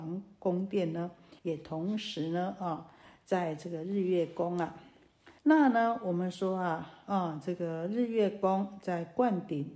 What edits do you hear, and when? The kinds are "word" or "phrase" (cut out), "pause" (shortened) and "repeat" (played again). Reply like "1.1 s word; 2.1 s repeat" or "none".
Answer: 1.4 s pause; 5.4 s pause